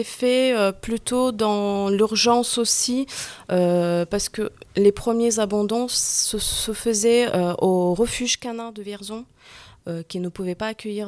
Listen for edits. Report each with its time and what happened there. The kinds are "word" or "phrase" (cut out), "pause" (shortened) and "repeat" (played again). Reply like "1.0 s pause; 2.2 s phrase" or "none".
none

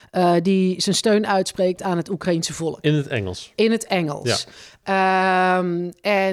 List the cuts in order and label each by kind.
none

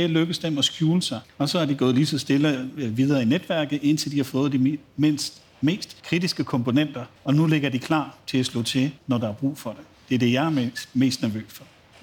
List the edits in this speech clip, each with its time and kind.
1.2 s pause; 6.0 s pause; 7.2 s pause; 9.0 s pause

